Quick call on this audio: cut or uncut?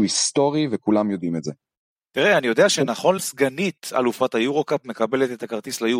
cut